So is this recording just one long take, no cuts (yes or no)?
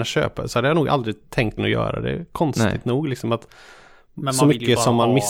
no